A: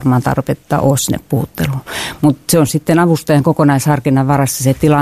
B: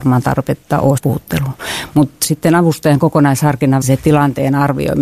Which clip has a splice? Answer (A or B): B